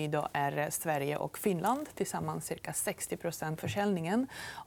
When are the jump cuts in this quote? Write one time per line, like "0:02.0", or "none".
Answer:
0:03.6